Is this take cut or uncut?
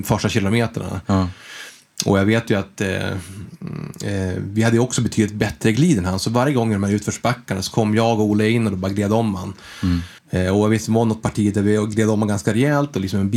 cut